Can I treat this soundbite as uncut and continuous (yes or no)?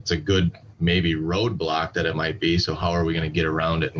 yes